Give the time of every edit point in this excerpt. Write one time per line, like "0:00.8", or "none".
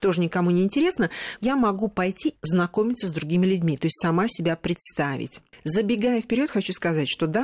0:02.4